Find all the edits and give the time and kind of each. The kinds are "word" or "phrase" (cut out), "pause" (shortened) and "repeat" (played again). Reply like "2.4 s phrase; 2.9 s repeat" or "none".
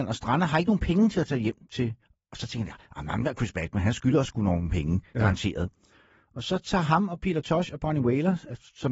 2.0 s pause